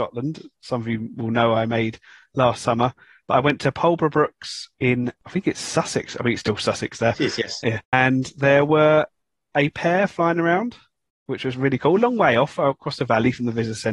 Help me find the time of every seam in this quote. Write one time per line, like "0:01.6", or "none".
0:07.8